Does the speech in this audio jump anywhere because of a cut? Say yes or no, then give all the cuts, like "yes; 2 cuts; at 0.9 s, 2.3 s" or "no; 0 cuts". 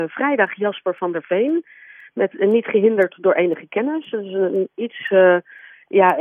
no; 0 cuts